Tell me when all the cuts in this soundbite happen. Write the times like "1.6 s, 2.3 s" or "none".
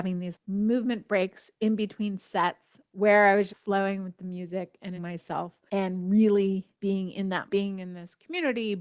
1.5 s, 3.5 s, 5.0 s, 5.7 s, 6.7 s, 7.5 s